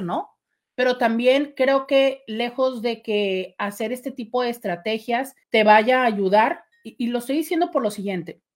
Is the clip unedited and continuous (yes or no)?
no